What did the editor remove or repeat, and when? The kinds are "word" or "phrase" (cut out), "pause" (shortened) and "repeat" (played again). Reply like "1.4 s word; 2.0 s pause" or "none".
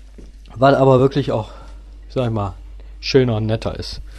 none